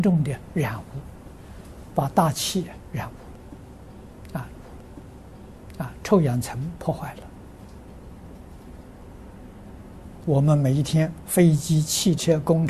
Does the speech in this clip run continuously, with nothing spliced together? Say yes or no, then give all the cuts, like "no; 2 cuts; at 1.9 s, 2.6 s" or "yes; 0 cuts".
no; 2 cuts; at 4.5 s, 10.2 s